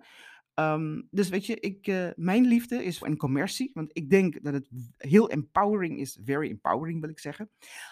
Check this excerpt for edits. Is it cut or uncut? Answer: cut